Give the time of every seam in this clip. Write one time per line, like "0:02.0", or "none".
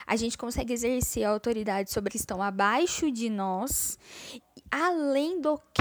0:02.1